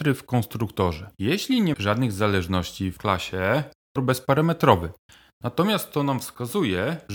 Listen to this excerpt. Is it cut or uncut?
cut